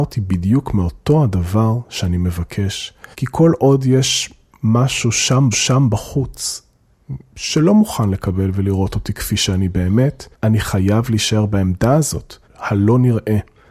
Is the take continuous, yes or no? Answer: no